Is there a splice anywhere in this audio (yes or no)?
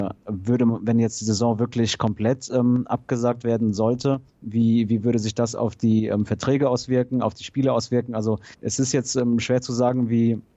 yes